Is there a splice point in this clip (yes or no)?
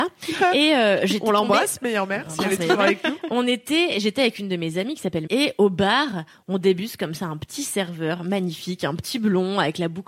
yes